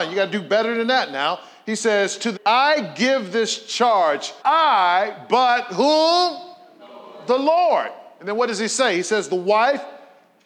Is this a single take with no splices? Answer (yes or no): no